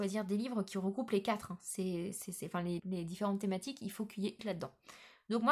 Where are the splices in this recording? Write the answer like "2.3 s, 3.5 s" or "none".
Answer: 2.8 s, 4.4 s

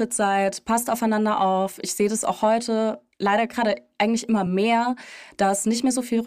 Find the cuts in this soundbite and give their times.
none

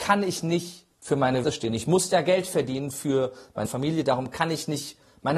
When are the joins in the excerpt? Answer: 0.9 s, 1.4 s, 3.7 s

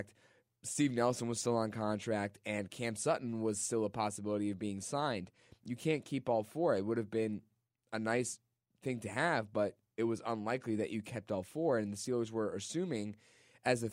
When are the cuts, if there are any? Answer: none

